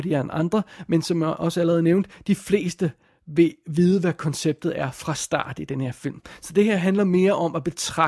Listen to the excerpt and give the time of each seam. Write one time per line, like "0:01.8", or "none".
none